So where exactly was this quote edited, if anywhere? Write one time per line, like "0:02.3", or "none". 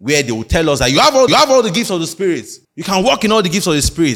0:01.3
0:02.6